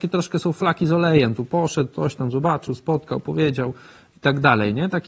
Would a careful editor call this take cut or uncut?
uncut